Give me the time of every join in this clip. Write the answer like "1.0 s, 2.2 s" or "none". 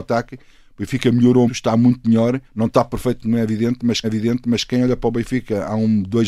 1.5 s, 2.4 s, 4.0 s

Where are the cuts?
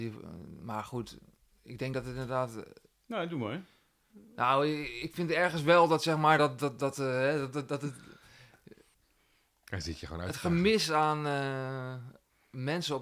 none

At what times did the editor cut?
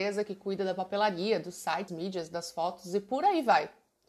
1.9 s

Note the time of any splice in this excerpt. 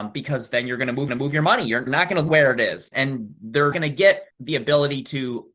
1.1 s, 1.9 s, 2.3 s, 2.9 s, 3.7 s, 4.3 s

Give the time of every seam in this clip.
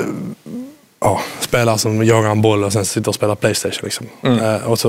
none

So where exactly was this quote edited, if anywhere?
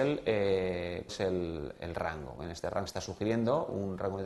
1.1 s, 2.9 s

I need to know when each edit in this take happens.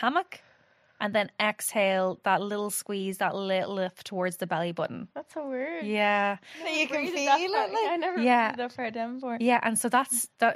5.1 s

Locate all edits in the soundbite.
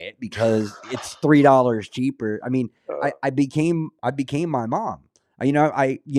none

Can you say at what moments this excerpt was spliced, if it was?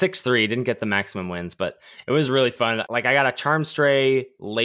none

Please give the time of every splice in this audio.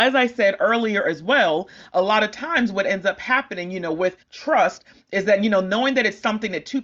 4.2 s

